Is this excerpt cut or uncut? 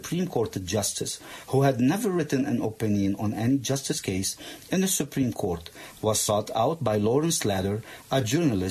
uncut